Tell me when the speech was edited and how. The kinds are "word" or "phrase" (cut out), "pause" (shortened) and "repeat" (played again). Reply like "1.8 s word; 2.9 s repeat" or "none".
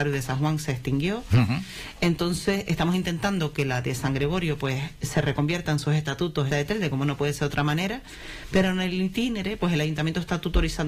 6.5 s phrase

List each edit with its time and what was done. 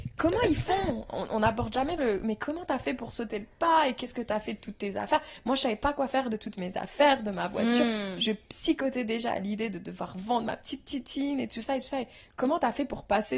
2.0 s word

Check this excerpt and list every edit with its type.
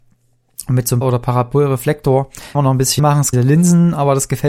1.0 s word; 2.5 s word; 3.0 s word; 3.3 s phrase

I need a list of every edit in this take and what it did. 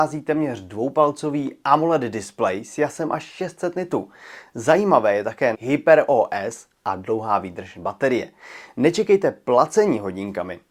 5.5 s phrase

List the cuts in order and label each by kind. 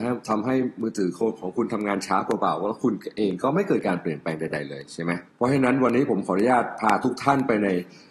5.3 s pause

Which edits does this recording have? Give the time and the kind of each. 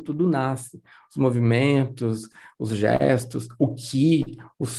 none

